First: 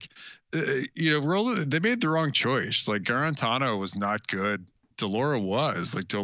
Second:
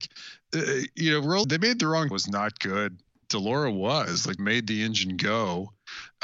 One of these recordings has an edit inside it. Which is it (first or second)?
second